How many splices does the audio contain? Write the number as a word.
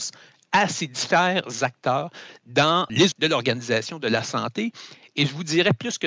one